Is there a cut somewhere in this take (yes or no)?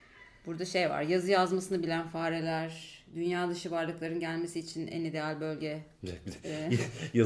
no